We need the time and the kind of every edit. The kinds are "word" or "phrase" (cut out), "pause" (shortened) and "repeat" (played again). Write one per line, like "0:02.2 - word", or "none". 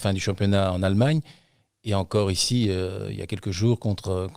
none

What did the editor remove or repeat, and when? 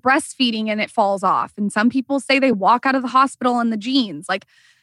none

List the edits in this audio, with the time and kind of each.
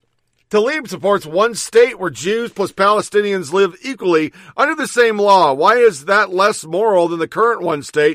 none

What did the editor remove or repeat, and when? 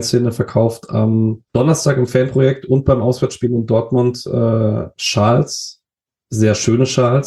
0:01.5 - pause

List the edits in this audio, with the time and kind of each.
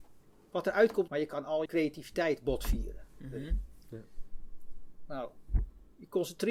0:01.1 - phrase
0:01.7 - word

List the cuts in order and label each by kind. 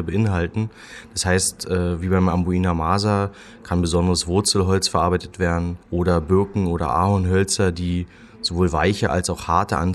0:05.8 - pause

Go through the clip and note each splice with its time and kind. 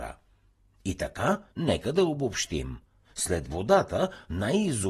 0:01.5 - pause

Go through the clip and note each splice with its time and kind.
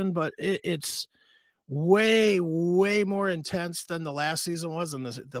none

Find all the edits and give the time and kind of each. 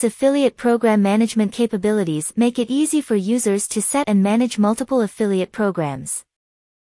0:04.0 - word

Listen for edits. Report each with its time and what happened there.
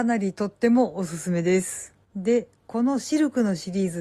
0:02.0 - pause

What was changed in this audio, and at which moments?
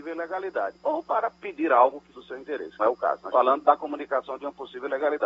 0:01.4 - pause
0:02.1 - word
0:02.8 - word
0:03.3 - word

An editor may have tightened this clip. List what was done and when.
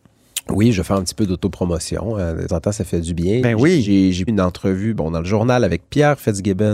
0:02.5 - word
0:04.3 - word

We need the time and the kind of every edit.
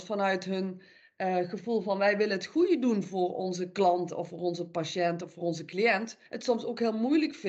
0:06.3 - pause

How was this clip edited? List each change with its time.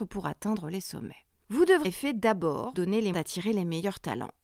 0:01.8 - word
0:02.7 - word
0:03.1 - word

